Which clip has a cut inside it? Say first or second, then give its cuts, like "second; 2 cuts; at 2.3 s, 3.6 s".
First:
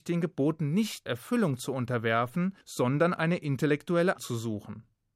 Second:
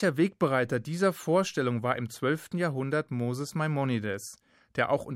first; 3 cuts; at 1.1 s, 2.6 s, 4.2 s